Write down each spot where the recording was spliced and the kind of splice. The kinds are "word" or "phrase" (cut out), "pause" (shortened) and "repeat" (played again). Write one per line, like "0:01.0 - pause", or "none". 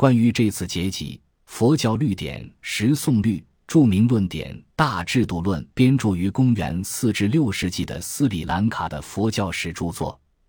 0:05.7 - pause